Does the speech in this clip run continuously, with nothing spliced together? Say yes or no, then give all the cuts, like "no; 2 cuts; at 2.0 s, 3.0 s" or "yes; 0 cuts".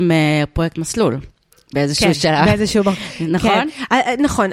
yes; 0 cuts